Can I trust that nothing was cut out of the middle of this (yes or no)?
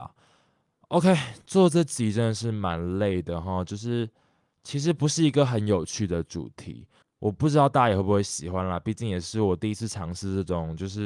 yes